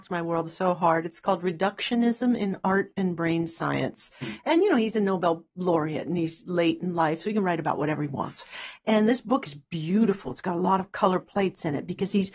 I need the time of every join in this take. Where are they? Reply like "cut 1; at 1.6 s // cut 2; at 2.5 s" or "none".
none